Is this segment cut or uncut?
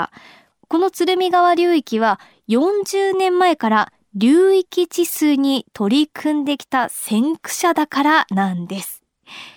uncut